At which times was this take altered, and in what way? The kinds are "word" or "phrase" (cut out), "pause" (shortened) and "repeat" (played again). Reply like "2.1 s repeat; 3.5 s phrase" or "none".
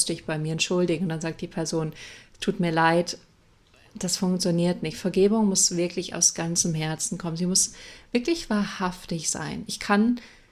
none